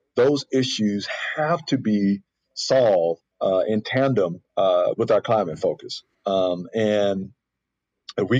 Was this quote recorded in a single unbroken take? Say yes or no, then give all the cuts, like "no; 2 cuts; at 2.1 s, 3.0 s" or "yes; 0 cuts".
no; 3 cuts; at 3.3 s, 4.5 s, 6.1 s